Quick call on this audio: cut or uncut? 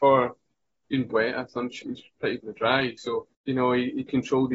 cut